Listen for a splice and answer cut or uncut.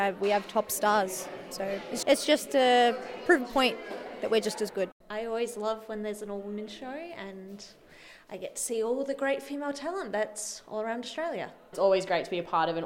cut